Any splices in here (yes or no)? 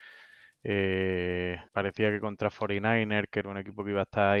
yes